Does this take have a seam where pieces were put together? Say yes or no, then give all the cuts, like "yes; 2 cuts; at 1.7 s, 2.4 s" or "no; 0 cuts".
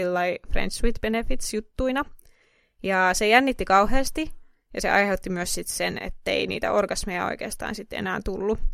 no; 0 cuts